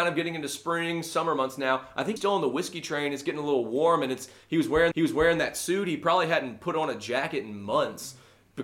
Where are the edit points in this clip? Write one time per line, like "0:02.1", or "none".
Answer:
0:02.2
0:04.9

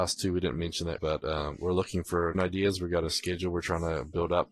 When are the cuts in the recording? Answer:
0:01.0
0:02.3

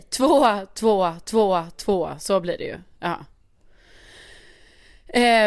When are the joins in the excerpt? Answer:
0:01.2

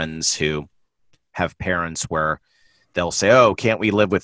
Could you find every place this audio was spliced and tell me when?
none

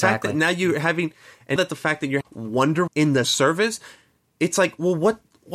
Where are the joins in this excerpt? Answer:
0:01.6
0:02.2
0:02.9
0:03.2

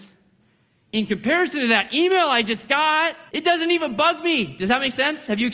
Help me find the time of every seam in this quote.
0:03.3

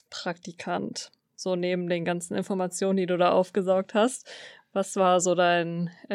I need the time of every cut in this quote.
none

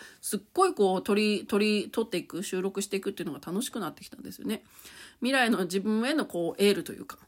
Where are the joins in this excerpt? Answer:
0:01.5

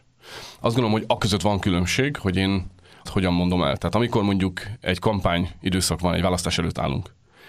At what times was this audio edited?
0:03.1

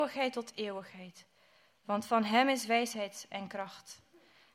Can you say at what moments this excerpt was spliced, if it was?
none

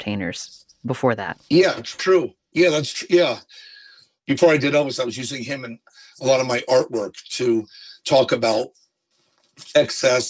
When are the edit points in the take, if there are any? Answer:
none

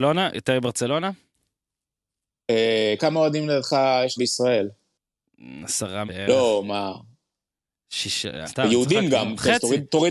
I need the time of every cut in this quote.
0:03.0
0:04.2
0:06.1
0:08.4

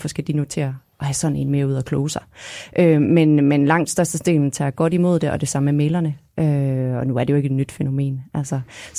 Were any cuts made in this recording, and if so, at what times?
none

